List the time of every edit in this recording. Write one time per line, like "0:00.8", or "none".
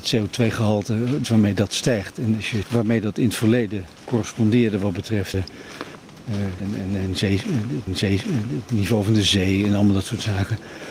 0:01.2
0:02.6
0:03.9
0:05.3
0:06.6
0:07.9